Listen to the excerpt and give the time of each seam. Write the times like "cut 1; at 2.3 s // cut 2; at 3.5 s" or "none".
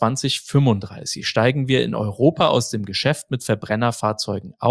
none